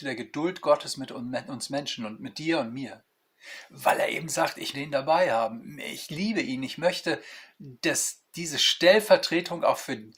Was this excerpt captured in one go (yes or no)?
no